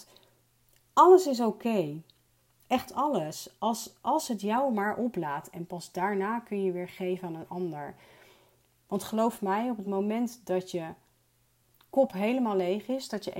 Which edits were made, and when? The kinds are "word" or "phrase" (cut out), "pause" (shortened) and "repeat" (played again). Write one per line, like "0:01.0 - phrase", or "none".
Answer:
none